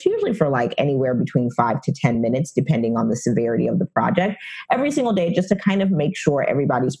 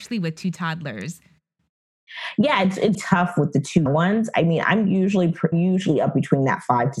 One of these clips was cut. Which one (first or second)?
second